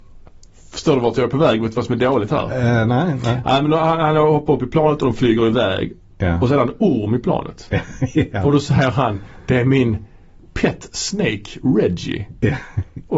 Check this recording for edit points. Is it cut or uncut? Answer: uncut